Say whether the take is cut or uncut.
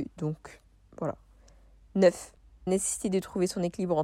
cut